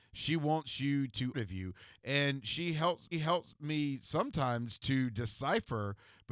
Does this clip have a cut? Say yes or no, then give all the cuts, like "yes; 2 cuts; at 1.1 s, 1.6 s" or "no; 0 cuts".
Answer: yes; 2 cuts; at 1.3 s, 3.1 s